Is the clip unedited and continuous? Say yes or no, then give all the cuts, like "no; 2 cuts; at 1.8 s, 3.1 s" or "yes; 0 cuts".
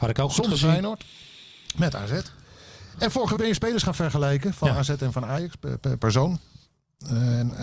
no; 2 cuts; at 3.4 s, 6.0 s